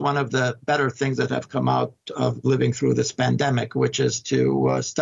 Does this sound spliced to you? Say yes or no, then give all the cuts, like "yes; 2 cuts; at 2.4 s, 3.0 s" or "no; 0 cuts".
no; 0 cuts